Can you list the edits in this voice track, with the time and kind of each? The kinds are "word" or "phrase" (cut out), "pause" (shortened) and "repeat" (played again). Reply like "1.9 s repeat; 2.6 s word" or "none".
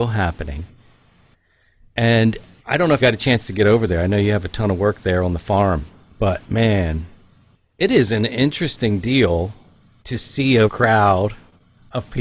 2.6 s word; 3.0 s word; 10.7 s word